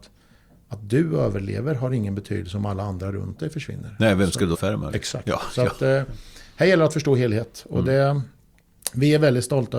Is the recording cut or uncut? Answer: cut